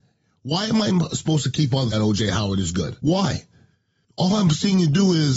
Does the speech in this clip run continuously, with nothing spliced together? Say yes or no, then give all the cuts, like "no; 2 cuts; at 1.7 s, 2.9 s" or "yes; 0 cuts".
no; 2 cuts; at 1.9 s, 3.0 s